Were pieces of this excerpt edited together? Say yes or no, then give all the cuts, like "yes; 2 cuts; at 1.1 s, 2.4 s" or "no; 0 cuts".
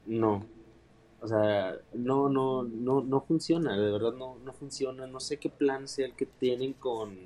yes; 1 cut; at 1.8 s